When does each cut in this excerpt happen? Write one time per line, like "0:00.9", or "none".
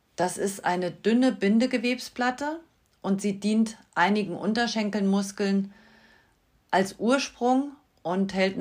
none